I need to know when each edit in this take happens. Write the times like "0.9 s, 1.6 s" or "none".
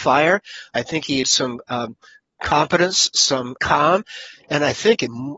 1.2 s, 3.6 s